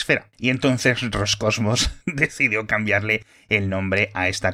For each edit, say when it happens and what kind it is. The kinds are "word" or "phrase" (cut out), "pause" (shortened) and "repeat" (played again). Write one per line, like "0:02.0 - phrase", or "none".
0:02.0 - pause